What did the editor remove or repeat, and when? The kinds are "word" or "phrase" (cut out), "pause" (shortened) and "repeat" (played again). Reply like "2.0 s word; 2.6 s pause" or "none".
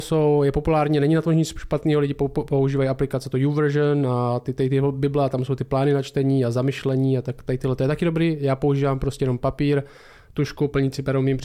none